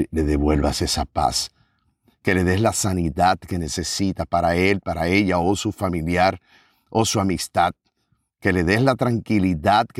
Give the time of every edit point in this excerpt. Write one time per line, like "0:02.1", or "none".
none